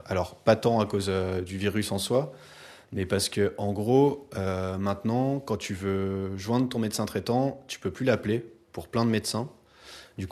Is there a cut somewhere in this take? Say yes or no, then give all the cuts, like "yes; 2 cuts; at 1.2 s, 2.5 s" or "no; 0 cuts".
no; 0 cuts